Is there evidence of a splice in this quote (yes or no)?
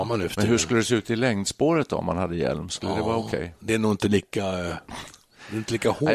yes